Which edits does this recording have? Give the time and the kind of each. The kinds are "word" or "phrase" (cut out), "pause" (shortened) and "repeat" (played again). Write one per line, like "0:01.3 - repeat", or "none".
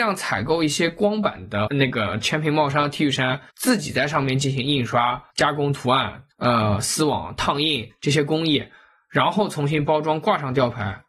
0:01.7 - word
0:03.5 - pause
0:05.3 - pause
0:06.3 - pause